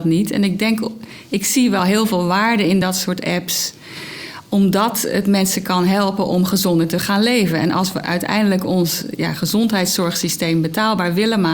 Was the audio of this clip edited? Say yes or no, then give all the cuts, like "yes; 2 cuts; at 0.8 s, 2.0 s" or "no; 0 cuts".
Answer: no; 0 cuts